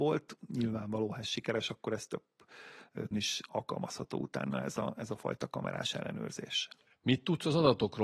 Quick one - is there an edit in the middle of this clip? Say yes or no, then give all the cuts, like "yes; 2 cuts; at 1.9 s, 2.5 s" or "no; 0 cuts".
yes; 1 cut; at 3.1 s